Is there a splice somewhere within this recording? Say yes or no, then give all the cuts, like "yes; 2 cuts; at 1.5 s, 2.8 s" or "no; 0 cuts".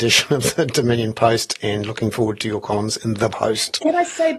no; 0 cuts